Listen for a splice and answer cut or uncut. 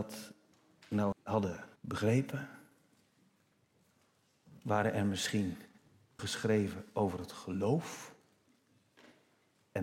cut